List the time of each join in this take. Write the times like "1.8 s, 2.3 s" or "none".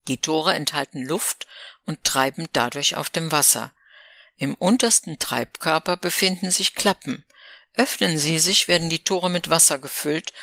none